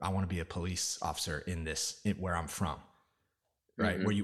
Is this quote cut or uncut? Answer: uncut